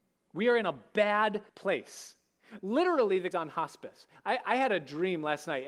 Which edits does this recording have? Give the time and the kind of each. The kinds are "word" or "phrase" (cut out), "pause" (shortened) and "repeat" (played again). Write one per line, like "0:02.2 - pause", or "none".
0:01.5 - pause
0:03.3 - word